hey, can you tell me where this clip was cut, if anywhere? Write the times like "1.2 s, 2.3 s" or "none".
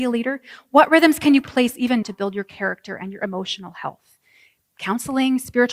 1.5 s, 2.0 s